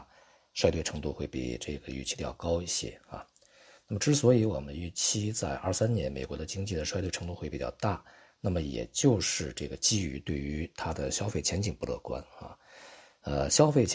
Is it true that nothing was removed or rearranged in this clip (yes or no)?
yes